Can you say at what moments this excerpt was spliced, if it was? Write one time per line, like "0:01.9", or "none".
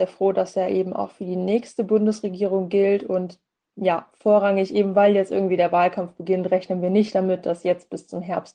none